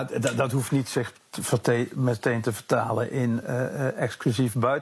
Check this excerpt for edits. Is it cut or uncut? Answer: cut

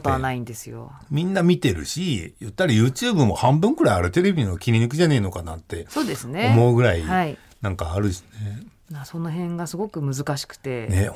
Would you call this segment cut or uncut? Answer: uncut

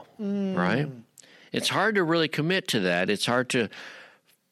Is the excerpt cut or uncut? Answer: uncut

